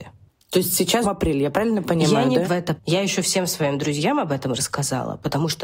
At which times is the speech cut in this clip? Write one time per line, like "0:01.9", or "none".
0:01.0
0:02.4
0:02.8